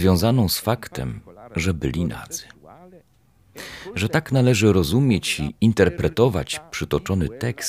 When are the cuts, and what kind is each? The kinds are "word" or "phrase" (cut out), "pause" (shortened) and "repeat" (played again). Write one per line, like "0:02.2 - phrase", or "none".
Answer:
none